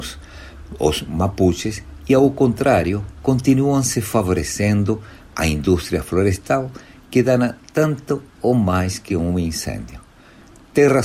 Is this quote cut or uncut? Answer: uncut